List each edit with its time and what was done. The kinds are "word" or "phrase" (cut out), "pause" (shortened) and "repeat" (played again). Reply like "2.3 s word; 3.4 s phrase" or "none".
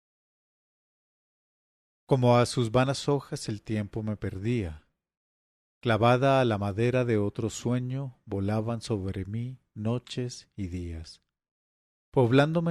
none